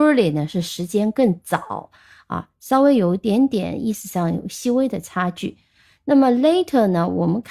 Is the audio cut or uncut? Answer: uncut